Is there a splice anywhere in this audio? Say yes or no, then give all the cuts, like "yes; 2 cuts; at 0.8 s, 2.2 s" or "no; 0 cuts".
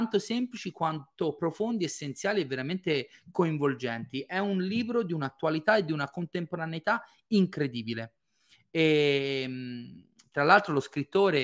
no; 0 cuts